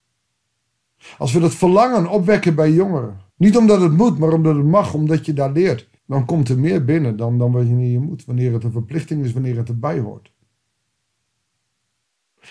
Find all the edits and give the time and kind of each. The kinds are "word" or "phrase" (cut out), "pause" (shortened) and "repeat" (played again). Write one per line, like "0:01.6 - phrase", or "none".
0:03.3 - pause
0:06.0 - pause

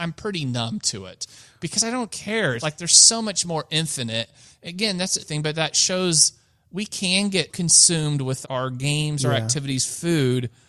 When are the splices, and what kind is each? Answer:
0:02.6 - word
0:05.2 - word
0:07.5 - word
0:08.4 - word

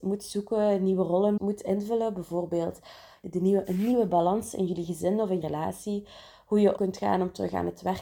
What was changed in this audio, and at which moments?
0:01.4 - word
0:05.4 - word
0:06.8 - word

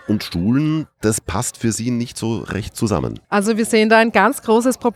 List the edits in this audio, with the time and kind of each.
0:03.2 - pause

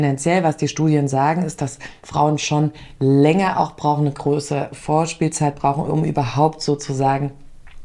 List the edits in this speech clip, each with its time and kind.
none

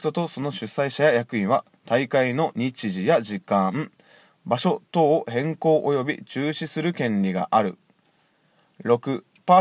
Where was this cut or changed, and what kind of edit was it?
none

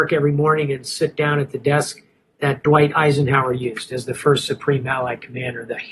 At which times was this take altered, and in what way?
none

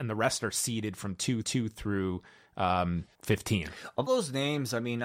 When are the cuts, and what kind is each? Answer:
0:01.4 - repeat
0:03.1 - pause
0:04.1 - word

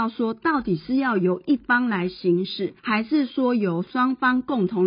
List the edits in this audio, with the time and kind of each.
0:02.8 - pause

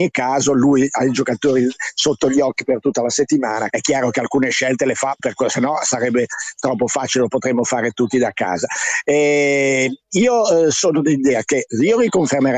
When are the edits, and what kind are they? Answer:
0:03.7 - word
0:05.2 - word

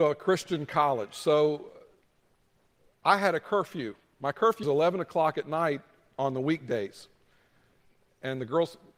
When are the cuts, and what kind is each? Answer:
0:04.6 - word

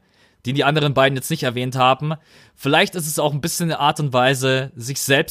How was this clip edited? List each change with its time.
none

